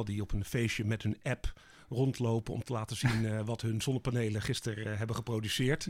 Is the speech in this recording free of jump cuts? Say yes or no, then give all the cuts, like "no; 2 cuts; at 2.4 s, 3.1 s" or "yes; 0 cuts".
yes; 0 cuts